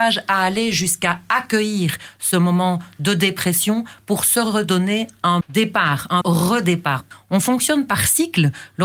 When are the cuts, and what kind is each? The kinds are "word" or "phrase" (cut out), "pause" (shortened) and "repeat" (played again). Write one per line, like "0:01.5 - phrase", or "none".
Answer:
0:05.4 - word
0:06.2 - word